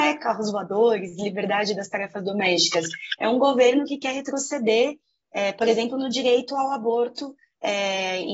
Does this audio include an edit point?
no; 0 cuts

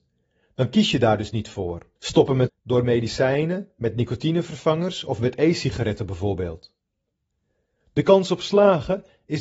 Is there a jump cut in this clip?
yes; 2 cuts; at 2.0 s, 2.5 s

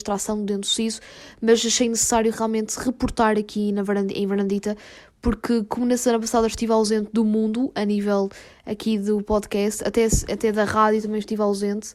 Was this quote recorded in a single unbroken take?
yes; 0 cuts

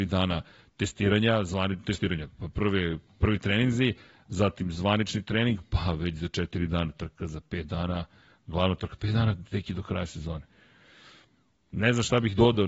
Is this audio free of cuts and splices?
yes; 0 cuts

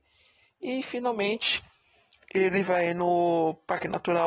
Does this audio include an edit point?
no; 0 cuts

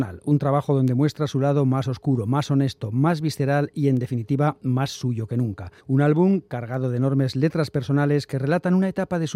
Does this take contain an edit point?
yes; 1 cut; at 5.8 s

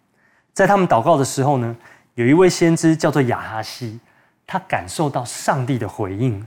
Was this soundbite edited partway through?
no; 0 cuts

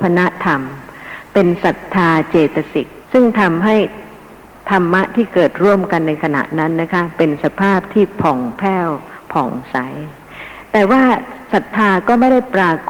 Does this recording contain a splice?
yes; 1 cut; at 3.0 s

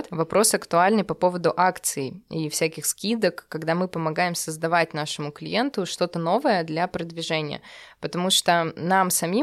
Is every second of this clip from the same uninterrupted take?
yes; 0 cuts

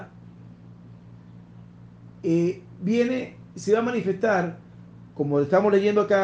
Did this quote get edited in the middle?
no; 0 cuts

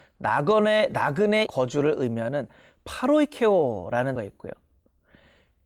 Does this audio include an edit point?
yes; 2 cuts; at 1.5 s, 4.2 s

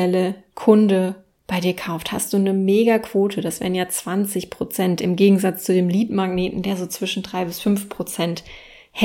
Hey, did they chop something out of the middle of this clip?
no; 0 cuts

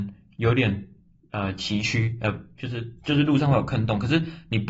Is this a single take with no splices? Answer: yes; 0 cuts

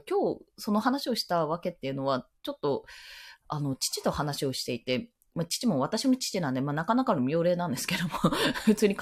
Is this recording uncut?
yes; 0 cuts

